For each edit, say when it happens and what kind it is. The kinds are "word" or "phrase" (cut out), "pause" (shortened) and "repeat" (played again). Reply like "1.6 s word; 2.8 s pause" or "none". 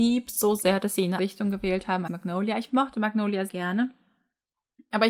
1.2 s word; 2.1 s word; 2.7 s word; 3.5 s word

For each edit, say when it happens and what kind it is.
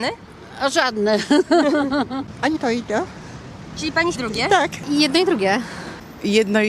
2.6 s word; 4.2 s phrase

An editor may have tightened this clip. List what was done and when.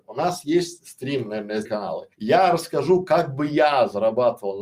1.6 s phrase; 2.1 s pause

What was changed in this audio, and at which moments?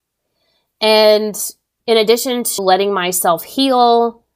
1.8 s word; 2.6 s word

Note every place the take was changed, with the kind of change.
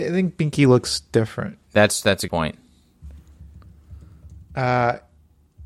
1.6 s pause; 2.3 s word

